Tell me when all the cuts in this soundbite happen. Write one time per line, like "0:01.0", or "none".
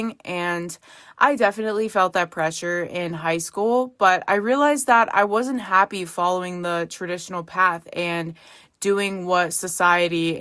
none